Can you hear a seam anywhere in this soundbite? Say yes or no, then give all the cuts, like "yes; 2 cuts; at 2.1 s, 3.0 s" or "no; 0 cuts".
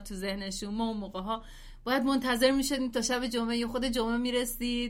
no; 0 cuts